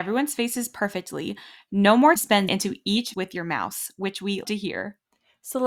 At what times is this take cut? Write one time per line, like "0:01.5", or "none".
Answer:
0:02.2
0:02.5
0:03.1
0:04.4

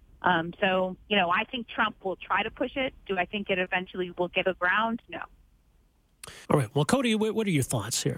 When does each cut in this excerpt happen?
0:01.0
0:04.4
0:06.4

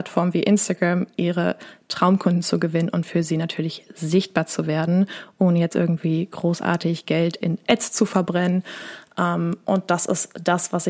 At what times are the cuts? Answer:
none

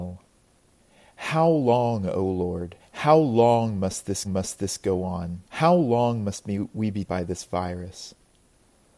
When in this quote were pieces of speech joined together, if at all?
0:02.8
0:04.2
0:05.4
0:07.1

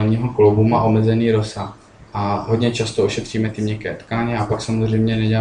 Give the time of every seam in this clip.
0:02.1

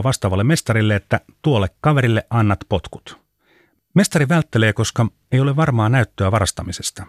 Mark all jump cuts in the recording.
none

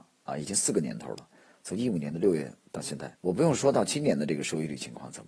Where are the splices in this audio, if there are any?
0:03.2

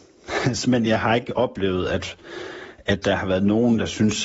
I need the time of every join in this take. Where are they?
none

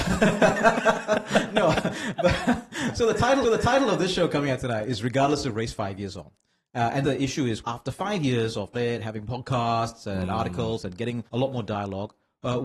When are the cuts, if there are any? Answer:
0:03.4
0:07.0
0:07.6
0:08.7
0:11.3

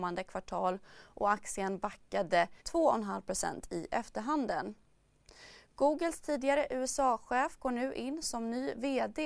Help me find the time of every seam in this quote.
0:02.6

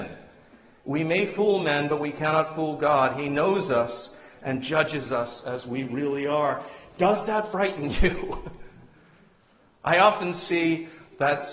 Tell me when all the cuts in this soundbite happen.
none

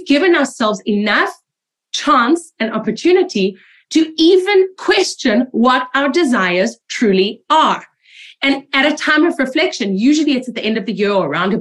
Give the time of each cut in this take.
none

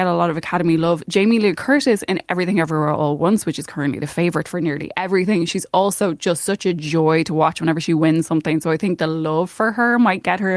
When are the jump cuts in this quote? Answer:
none

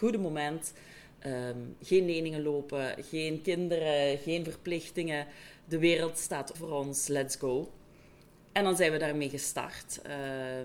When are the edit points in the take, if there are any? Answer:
0:06.5

